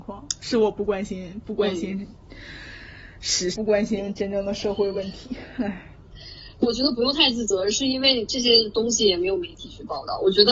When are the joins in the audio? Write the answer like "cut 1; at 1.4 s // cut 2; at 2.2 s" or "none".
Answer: cut 1; at 3.5 s // cut 2; at 6.6 s